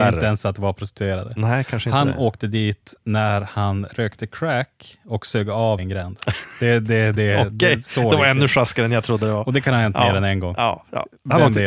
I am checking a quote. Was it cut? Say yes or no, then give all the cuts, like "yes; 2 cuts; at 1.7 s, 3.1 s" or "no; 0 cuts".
yes; 1 cut; at 5.8 s